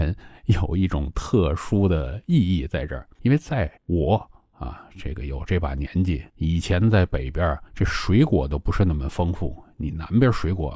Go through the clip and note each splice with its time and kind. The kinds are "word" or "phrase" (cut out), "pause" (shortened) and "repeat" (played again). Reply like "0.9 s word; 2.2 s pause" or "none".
3.1 s pause; 3.8 s pause; 6.3 s pause; 7.7 s pause